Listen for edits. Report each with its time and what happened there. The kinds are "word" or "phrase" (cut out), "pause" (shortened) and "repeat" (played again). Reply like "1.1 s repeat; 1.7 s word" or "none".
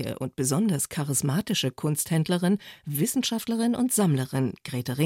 none